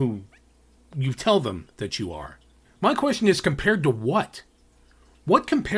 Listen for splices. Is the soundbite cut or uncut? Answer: cut